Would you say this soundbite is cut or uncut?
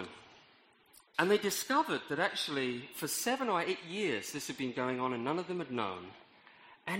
cut